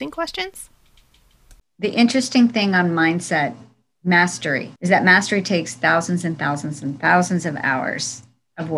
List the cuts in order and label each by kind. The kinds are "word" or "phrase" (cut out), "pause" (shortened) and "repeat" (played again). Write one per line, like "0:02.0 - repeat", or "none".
0:04.8 - pause